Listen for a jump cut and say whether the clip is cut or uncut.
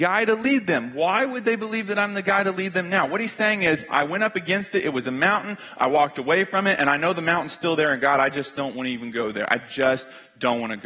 uncut